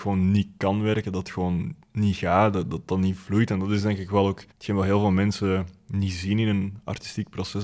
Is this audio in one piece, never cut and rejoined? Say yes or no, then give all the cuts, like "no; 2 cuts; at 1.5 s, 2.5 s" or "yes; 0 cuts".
no; 2 cuts; at 1.8 s, 4.5 s